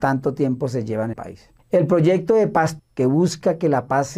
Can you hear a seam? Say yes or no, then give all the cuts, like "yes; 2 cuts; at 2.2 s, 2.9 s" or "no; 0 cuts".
yes; 3 cuts; at 1.1 s, 1.6 s, 2.8 s